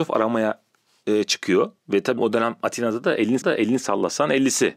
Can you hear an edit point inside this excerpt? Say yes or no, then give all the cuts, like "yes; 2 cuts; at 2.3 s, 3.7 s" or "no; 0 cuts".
yes; 3 cuts; at 1.8 s, 2.2 s, 3.4 s